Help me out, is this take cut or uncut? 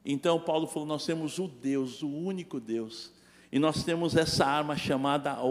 uncut